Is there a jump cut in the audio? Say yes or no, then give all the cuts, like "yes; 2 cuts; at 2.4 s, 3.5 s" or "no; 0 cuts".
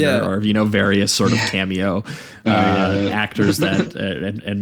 no; 0 cuts